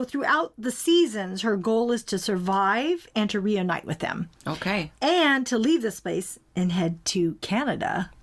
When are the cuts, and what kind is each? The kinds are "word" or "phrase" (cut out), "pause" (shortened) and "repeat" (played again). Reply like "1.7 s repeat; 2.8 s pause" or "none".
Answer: none